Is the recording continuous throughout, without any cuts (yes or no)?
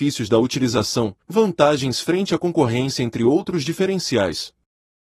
no